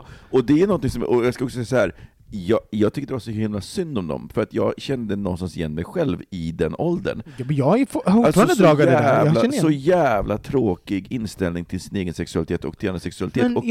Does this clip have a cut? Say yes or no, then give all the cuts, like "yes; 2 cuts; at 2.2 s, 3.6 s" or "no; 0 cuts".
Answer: no; 0 cuts